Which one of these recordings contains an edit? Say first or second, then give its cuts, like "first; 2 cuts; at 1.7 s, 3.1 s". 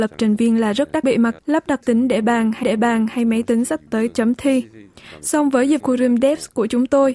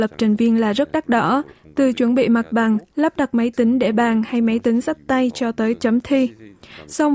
first; 6 cuts; at 1.0 s, 1.4 s, 1.8 s, 2.6 s, 3.9 s, 5.8 s